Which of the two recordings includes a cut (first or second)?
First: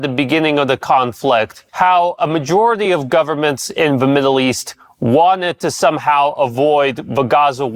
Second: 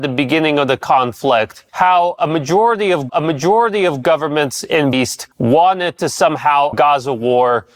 second